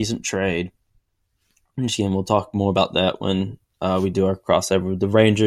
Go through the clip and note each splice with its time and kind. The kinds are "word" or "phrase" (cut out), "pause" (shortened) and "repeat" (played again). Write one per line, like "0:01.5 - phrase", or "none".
none